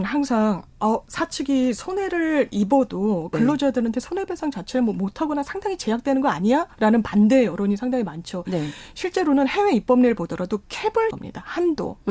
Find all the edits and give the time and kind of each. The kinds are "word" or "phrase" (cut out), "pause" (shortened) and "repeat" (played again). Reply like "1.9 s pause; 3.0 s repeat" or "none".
6.7 s pause; 11.1 s word